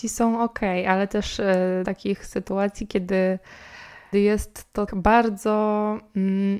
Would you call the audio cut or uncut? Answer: cut